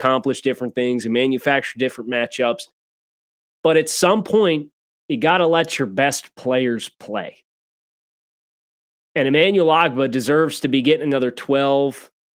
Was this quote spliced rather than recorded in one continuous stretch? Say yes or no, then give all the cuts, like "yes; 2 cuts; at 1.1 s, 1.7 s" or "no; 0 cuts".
yes; 1 cut; at 4.9 s